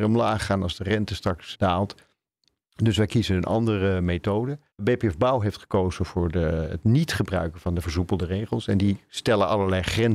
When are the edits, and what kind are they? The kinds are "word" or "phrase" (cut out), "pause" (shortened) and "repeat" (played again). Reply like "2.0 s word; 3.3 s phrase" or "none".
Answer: 1.5 s word; 4.7 s pause